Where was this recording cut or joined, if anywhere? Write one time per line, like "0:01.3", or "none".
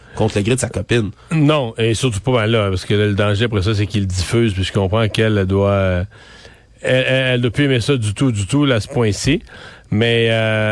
none

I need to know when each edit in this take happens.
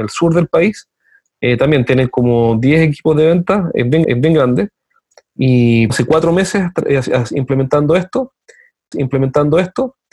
0:04.0
0:05.9
0:08.9

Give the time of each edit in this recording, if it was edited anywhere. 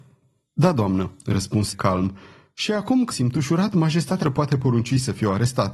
0:01.7
0:03.1
0:04.2

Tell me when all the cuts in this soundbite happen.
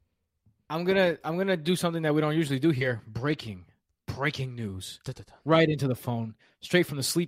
none

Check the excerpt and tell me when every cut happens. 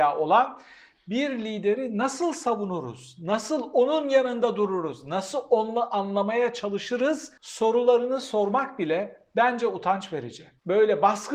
0:07.4

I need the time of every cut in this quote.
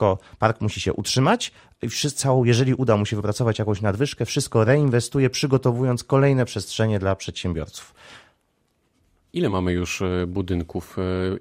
none

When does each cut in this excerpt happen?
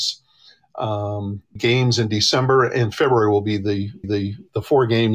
0:01.6
0:04.0

